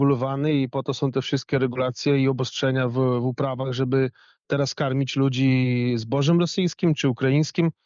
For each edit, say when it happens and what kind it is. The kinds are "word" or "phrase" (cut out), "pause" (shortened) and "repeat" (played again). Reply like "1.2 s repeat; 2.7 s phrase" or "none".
none